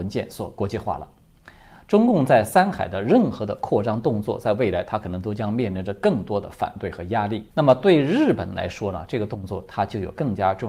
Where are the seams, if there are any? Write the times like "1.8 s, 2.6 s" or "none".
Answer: 7.5 s